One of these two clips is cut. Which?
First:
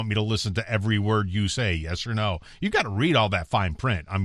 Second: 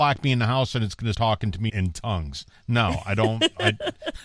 second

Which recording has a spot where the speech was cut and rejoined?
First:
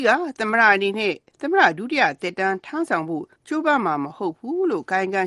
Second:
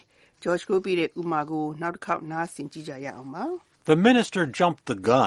first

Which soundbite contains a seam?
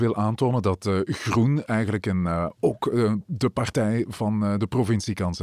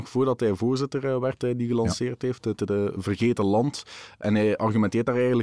second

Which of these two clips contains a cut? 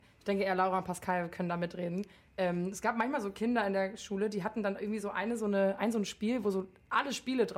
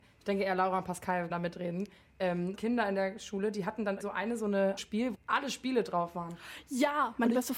second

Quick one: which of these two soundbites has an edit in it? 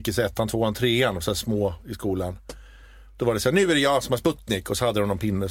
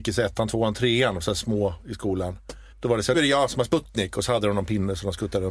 second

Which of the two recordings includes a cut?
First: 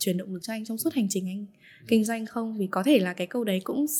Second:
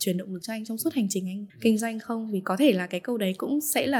second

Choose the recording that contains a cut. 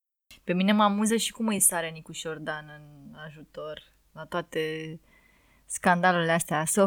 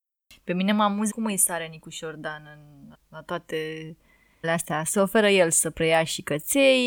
second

